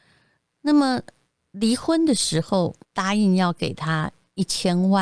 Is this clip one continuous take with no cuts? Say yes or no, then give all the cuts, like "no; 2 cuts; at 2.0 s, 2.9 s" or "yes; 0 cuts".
no; 1 cut; at 2.8 s